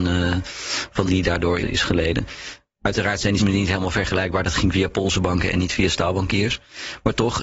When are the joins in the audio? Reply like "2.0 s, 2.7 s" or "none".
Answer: 1.1 s, 1.6 s, 3.4 s